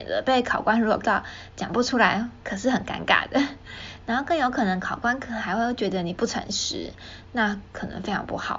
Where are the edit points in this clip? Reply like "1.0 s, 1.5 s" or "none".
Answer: 1.0 s